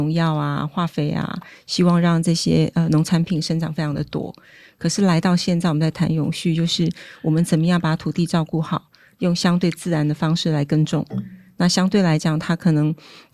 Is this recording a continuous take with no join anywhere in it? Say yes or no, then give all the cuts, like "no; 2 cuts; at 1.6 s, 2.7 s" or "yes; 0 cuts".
yes; 0 cuts